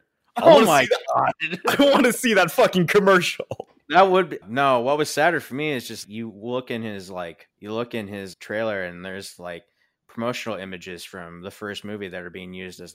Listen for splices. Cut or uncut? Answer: cut